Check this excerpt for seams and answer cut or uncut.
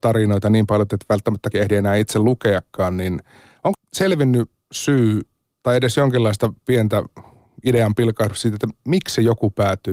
cut